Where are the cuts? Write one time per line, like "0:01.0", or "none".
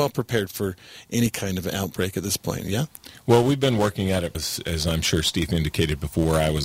0:04.3